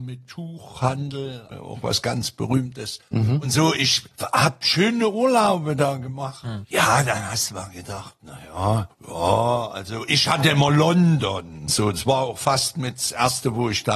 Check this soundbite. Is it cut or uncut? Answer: uncut